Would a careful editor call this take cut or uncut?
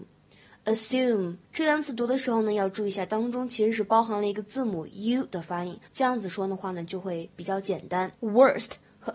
cut